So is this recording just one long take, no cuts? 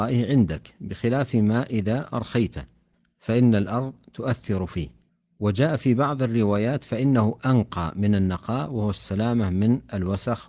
yes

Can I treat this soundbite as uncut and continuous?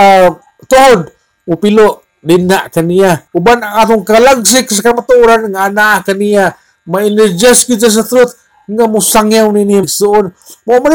no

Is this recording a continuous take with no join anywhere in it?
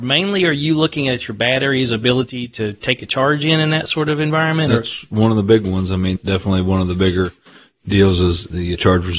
yes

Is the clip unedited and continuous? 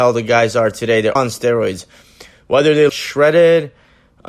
no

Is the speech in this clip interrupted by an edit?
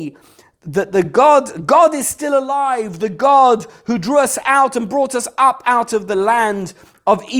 no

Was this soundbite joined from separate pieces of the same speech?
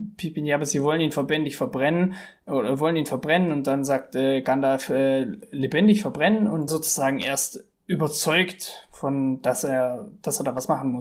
yes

